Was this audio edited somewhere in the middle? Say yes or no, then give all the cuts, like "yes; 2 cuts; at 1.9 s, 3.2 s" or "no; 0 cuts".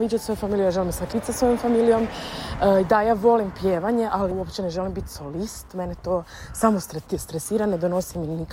yes; 2 cuts; at 1.1 s, 4.3 s